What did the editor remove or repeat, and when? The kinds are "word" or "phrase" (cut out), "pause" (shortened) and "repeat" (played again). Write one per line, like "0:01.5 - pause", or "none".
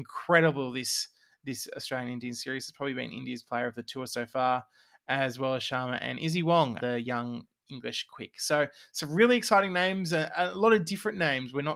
0:06.8 - word